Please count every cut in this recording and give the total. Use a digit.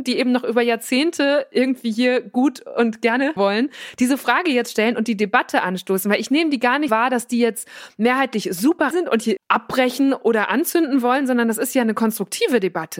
4